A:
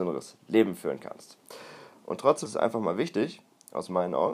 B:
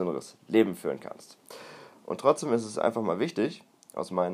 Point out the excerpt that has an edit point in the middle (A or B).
A